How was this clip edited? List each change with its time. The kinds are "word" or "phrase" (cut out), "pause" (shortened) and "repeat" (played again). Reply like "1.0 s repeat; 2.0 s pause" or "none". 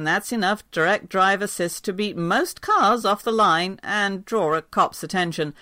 none